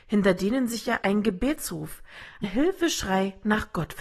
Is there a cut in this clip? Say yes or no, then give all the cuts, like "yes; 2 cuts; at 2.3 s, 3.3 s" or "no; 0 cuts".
yes; 2 cuts; at 1.0 s, 2.4 s